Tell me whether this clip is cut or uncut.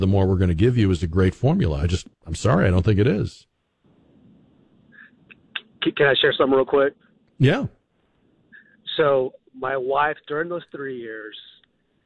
uncut